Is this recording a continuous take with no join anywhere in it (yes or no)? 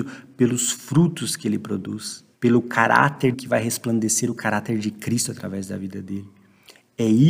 no